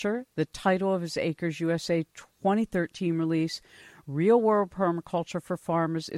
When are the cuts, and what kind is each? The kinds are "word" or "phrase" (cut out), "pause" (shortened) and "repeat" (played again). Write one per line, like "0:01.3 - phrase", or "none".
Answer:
none